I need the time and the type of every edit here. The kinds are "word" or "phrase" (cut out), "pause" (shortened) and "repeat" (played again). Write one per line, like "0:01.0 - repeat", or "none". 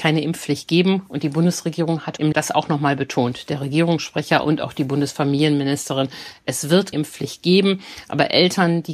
0:02.3 - phrase
0:06.9 - word